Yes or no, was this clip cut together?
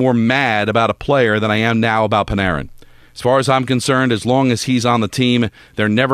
no